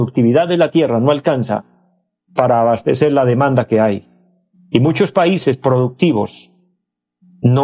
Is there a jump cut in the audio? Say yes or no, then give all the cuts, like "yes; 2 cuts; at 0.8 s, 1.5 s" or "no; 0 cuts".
no; 0 cuts